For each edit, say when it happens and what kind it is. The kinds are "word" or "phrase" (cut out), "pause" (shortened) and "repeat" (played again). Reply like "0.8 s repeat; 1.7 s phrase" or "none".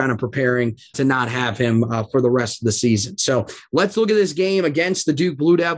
0.9 s word